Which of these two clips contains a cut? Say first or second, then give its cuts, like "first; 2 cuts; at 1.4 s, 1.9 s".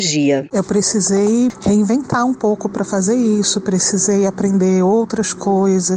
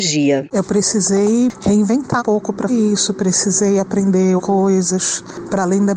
second; 3 cuts; at 2.2 s, 2.7 s, 4.4 s